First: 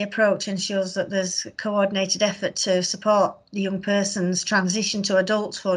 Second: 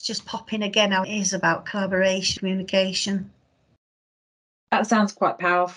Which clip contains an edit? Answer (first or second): second